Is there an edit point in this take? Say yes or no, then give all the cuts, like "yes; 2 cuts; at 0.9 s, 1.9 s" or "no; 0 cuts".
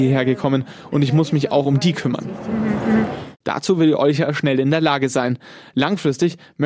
no; 0 cuts